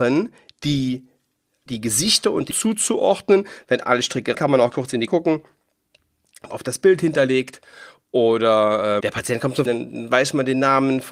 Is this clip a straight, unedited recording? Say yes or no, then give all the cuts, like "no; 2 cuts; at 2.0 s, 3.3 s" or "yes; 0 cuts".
no; 8 cuts; at 1.7 s, 2.5 s, 4.3 s, 4.7 s, 5.1 s, 6.5 s, 9.0 s, 9.7 s